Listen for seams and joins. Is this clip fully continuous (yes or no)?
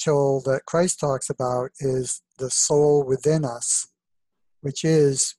yes